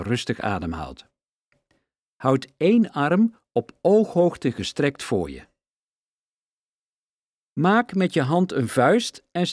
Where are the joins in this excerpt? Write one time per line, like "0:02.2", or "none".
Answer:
none